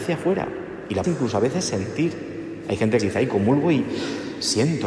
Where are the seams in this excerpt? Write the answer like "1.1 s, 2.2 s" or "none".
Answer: 1.0 s, 3.0 s